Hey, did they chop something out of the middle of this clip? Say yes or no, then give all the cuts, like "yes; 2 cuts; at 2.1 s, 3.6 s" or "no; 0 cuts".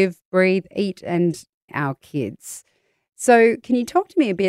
yes; 1 cut; at 1.7 s